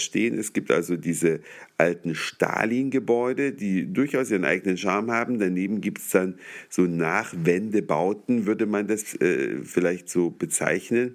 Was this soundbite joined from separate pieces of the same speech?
no; 0 cuts

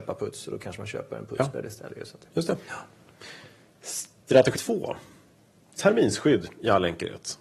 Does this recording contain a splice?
yes; 1 cut; at 4.5 s

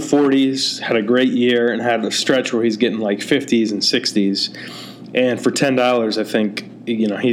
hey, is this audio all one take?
yes; 0 cuts

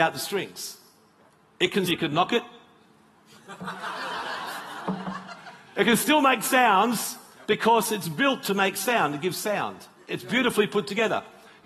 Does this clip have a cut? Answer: yes; 1 cut; at 1.9 s

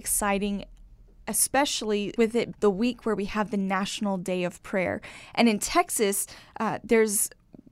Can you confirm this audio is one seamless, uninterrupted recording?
no; 2 cuts; at 2.2 s, 2.5 s

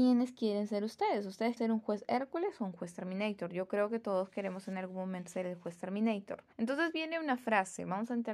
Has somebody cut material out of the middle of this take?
yes; 3 cuts; at 1.6 s, 5.3 s, 6.5 s

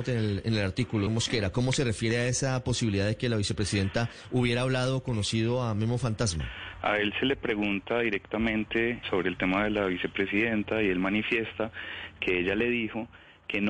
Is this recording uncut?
no; 2 cuts; at 1.1 s, 9.0 s

